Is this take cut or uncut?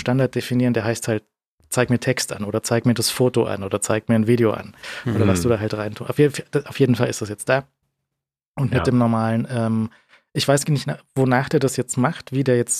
uncut